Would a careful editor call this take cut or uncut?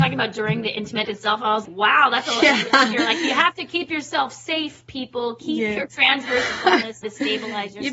cut